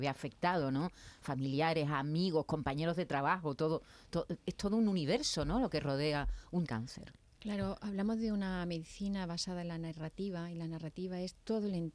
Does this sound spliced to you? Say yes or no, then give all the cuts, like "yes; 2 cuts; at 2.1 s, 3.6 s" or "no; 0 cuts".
yes; 1 cut; at 6.7 s